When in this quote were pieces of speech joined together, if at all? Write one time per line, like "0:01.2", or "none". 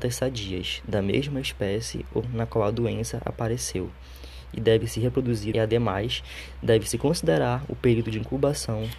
0:02.2
0:05.5